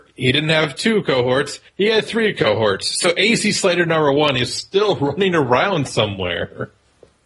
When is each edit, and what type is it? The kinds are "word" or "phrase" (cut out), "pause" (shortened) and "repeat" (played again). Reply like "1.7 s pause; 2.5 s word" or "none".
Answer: 1.7 s pause